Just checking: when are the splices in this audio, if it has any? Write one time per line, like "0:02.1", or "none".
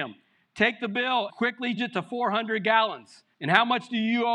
0:01.3
0:01.8
0:03.3